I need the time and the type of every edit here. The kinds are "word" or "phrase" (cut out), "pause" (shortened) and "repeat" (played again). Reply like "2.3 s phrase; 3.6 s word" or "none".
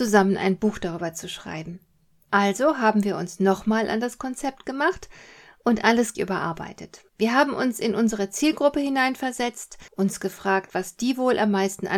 6.1 s word; 7.1 s pause; 9.9 s pause